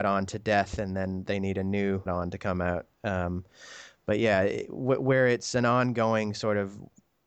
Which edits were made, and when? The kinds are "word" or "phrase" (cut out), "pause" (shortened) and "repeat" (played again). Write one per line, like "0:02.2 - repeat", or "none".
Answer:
0:02.1 - word